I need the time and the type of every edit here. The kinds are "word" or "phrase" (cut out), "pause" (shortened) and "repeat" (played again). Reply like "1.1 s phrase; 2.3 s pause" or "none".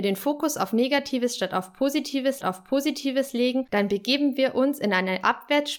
2.4 s repeat